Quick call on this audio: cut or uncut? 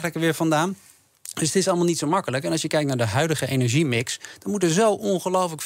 uncut